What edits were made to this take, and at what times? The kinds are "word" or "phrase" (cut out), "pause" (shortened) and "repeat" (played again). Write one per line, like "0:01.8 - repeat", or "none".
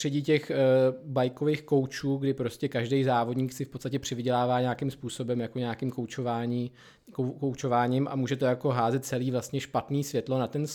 none